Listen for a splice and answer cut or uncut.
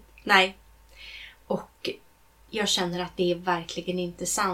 uncut